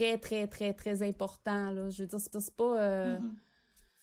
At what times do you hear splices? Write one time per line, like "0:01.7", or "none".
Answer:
0:02.3